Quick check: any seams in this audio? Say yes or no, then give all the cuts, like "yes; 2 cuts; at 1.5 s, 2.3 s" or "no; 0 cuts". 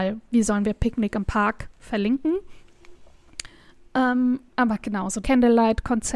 yes; 1 cut; at 5.2 s